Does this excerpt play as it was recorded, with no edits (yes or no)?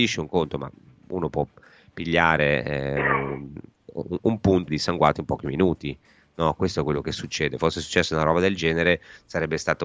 no